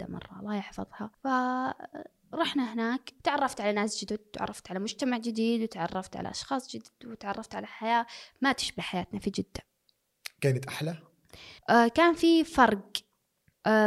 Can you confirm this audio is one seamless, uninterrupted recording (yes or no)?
no